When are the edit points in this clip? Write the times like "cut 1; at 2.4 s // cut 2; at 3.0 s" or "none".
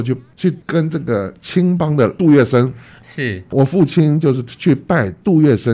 cut 1; at 3.5 s